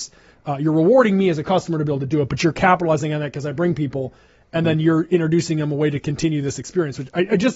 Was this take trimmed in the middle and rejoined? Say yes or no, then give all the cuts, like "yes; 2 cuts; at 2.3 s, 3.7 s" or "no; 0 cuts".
no; 0 cuts